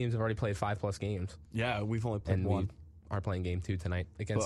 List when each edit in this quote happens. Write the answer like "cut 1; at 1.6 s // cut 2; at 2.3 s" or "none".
none